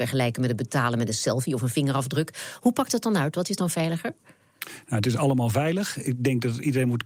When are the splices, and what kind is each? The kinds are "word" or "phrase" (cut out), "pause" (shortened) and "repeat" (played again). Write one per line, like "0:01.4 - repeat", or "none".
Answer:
none